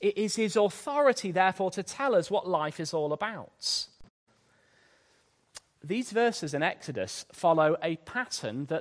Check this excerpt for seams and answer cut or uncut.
uncut